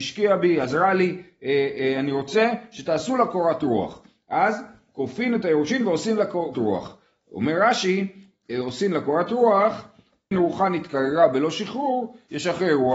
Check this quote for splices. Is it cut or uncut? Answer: cut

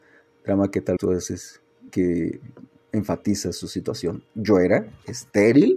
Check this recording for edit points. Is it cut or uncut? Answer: cut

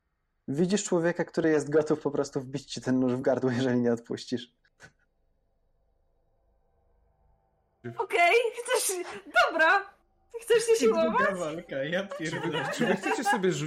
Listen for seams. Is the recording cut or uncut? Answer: uncut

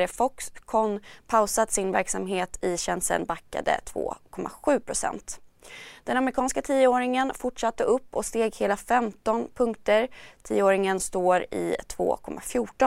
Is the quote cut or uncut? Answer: uncut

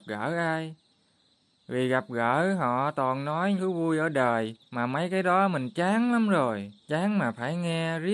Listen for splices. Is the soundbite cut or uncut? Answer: cut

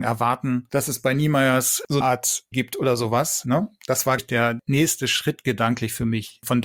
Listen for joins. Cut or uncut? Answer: cut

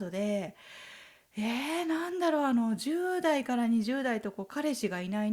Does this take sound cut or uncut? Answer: uncut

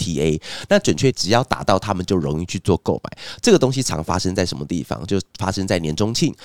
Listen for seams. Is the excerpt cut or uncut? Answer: cut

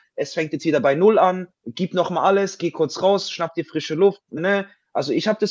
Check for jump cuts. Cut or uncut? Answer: cut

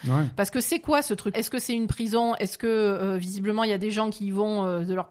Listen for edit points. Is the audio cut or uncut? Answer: cut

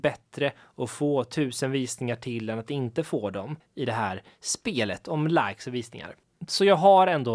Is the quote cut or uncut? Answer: uncut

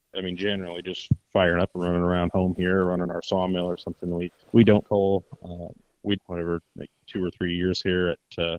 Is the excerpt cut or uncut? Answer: cut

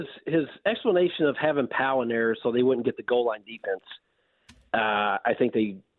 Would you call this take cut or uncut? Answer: uncut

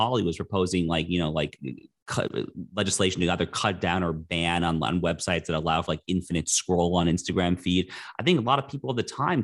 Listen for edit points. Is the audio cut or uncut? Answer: uncut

